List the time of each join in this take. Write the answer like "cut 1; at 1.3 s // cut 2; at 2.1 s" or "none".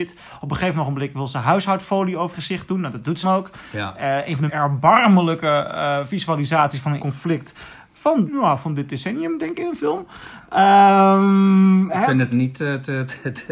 cut 1; at 2.3 s // cut 2; at 3.2 s // cut 3; at 4.5 s // cut 4; at 7.0 s // cut 5; at 8.3 s // cut 6; at 9.5 s // cut 7; at 11.9 s // cut 8; at 12.3 s